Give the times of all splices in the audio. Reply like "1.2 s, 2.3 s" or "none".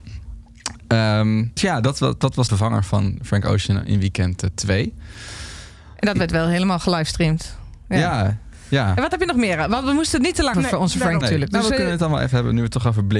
1.6 s, 2.5 s, 10.5 s, 11.2 s

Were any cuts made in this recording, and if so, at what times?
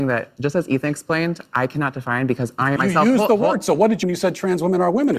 2.8 s, 4.0 s

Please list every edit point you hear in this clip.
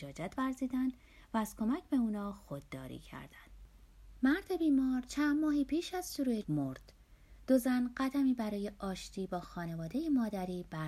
6.4 s

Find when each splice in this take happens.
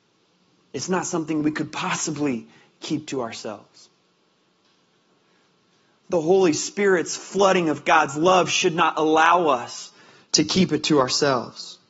none

